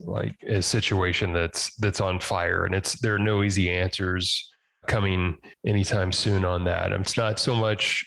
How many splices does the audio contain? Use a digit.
1